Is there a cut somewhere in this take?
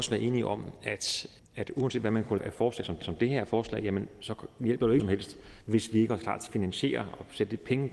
yes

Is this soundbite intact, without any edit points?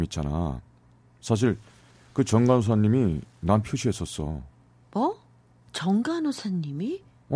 no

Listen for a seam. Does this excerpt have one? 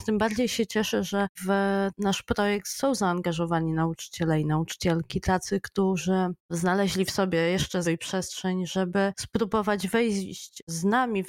yes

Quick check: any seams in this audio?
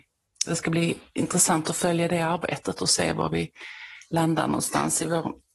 no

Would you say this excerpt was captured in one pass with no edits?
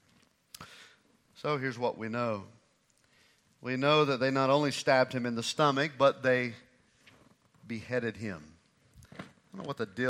yes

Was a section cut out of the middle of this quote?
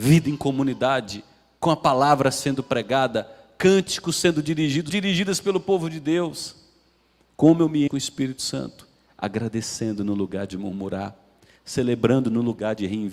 yes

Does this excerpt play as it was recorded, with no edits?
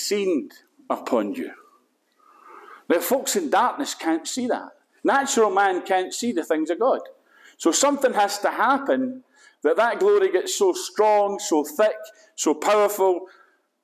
yes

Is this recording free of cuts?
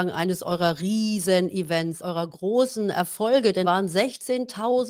no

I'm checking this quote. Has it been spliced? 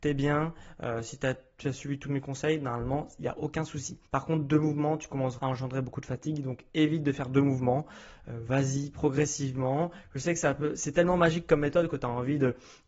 yes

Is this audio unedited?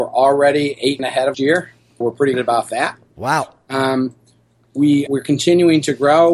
no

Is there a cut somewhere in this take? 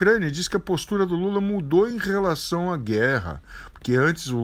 no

